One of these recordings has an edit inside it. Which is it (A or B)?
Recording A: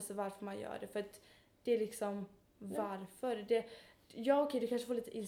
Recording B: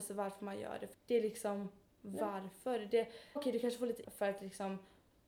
B